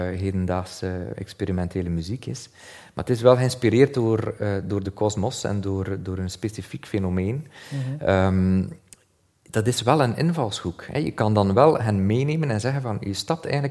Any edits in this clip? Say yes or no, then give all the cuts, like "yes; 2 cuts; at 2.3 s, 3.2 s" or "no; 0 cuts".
no; 0 cuts